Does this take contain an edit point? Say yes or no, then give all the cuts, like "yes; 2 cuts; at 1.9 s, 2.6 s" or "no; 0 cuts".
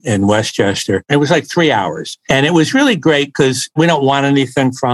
no; 0 cuts